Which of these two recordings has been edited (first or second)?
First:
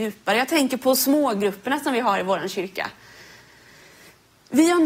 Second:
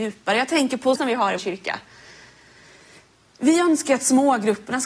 second